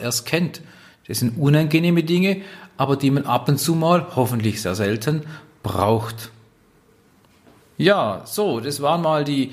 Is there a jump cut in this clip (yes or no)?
no